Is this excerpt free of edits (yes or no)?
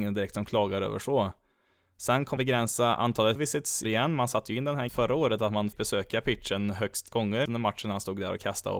no